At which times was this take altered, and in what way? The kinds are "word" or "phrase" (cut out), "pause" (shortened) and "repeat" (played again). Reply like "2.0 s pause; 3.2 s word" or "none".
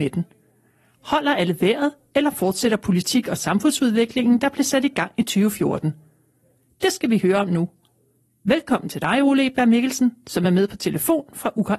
none